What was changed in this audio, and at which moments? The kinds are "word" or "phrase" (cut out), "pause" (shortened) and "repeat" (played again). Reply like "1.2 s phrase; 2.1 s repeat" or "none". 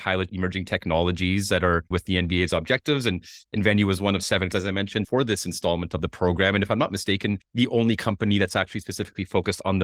1.9 s word; 4.5 s word; 5.0 s word